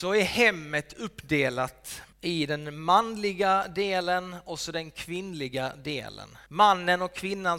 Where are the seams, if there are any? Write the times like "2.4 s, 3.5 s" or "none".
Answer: 2.1 s, 6.5 s